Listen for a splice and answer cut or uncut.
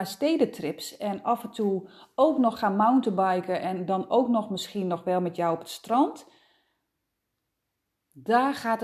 uncut